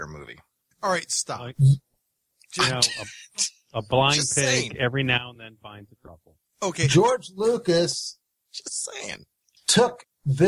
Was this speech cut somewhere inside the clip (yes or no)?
no